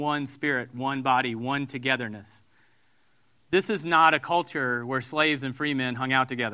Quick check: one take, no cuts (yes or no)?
yes